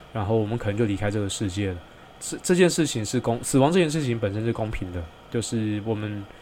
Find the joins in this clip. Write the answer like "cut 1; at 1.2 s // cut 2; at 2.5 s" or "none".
cut 1; at 5.2 s